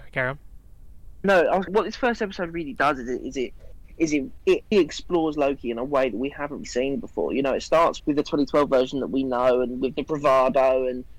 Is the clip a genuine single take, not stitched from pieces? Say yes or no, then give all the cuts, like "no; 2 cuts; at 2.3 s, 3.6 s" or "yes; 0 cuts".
no; 6 cuts; at 1.2 s, 1.7 s, 4.4 s, 4.7 s, 6.6 s, 8.0 s